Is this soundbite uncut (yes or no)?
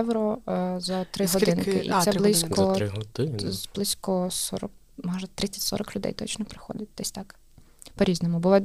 no